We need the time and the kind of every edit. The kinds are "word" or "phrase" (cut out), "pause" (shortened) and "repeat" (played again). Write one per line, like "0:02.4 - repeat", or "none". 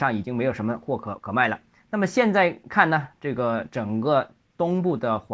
0:01.8 - pause